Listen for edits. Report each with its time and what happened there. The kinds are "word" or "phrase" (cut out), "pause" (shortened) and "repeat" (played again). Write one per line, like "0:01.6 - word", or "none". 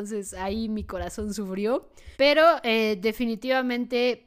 0:02.1 - pause